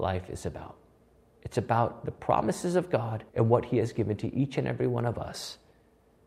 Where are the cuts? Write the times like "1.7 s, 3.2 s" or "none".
3.3 s